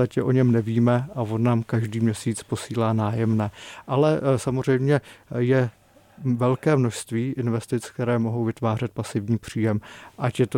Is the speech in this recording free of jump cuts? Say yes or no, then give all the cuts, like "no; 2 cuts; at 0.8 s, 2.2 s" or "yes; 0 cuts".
yes; 0 cuts